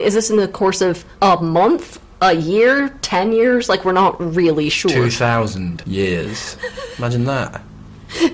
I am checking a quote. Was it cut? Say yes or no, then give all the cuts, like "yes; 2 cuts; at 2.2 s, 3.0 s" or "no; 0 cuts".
yes; 1 cut; at 1.1 s